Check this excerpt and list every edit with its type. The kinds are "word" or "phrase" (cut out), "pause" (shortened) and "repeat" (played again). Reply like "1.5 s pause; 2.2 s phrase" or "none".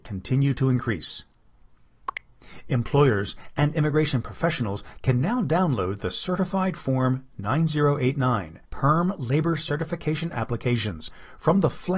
8.6 s pause